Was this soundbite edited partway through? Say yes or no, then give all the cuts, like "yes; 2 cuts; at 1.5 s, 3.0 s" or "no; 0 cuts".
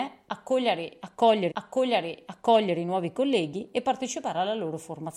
yes; 1 cut; at 1.5 s